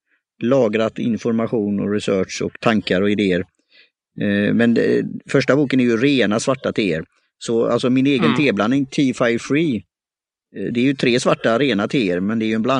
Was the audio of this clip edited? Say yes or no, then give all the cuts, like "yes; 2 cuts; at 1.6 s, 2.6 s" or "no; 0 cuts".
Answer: no; 0 cuts